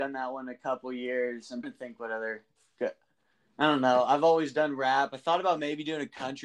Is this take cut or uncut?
cut